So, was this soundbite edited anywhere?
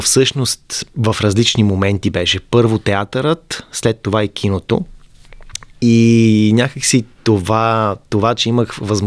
no; 0 cuts

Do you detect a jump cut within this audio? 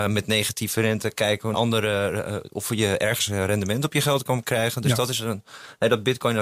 yes; 1 cut; at 1.5 s

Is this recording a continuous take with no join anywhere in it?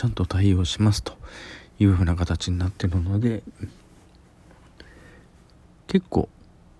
yes; 0 cuts

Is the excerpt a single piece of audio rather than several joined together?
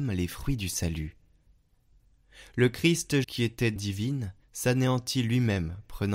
no; 3 cuts; at 3.2 s, 3.8 s, 4.4 s

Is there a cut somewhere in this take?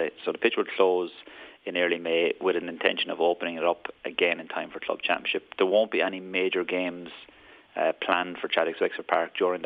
no; 0 cuts

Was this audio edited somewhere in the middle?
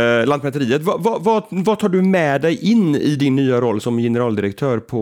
yes; 1 cut; at 3.8 s

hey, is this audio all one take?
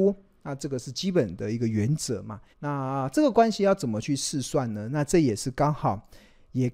no; 1 cut; at 2.5 s

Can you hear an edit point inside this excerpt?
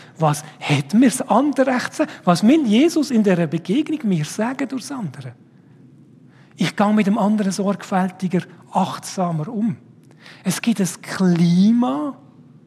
no; 0 cuts

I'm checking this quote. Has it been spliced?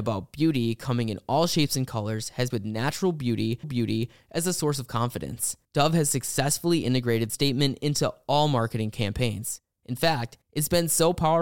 yes; 6 cuts; at 2.5 s, 3.6 s, 5.6 s, 7.3 s, 9.7 s, 10.4 s

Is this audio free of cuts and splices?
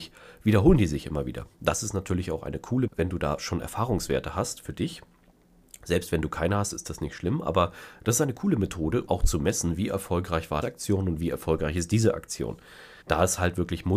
no; 4 cuts; at 2.9 s, 9.1 s, 10.6 s, 13.0 s

